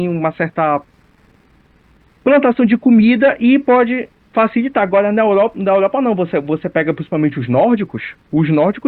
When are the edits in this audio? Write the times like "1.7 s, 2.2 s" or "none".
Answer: none